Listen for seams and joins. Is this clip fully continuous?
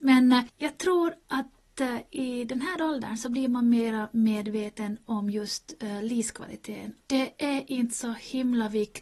no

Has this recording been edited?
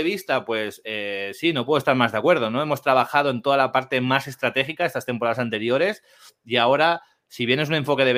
no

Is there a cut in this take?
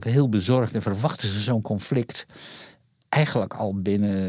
no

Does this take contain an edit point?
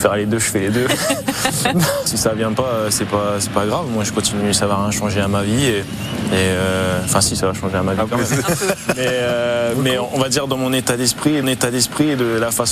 yes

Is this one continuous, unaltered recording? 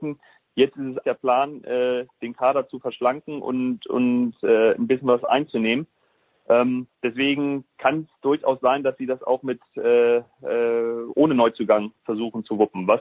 no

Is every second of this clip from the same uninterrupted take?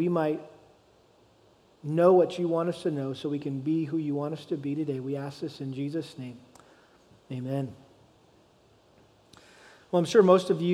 yes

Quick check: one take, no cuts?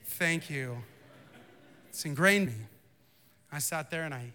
no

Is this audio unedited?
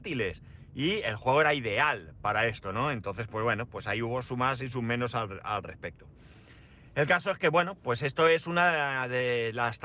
yes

